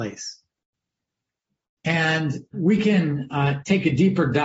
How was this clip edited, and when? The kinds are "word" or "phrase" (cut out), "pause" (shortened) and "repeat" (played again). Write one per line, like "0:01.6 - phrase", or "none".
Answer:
none